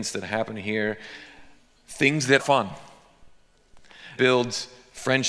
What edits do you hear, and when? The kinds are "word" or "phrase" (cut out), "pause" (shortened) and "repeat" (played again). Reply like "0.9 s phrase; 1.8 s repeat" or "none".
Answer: 2.4 s word; 4.2 s word